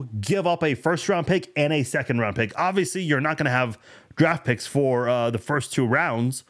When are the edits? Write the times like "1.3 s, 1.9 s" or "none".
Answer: none